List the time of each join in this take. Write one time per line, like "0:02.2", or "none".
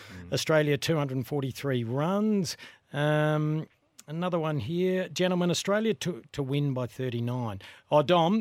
none